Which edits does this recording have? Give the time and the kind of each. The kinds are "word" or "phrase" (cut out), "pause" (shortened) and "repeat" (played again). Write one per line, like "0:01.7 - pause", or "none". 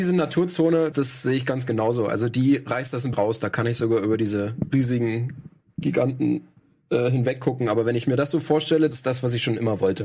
0:00.9 - word
0:03.1 - word
0:08.9 - word